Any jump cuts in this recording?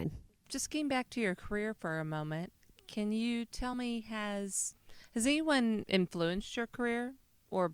no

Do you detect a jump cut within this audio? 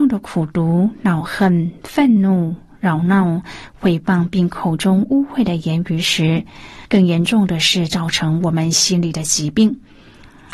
yes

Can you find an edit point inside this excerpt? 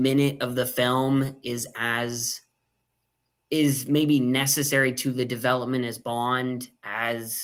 no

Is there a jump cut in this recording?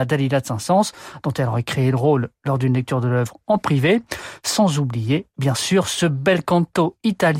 no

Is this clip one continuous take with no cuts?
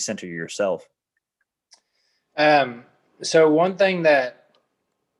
yes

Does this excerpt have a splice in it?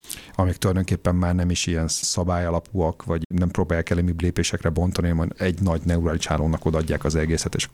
yes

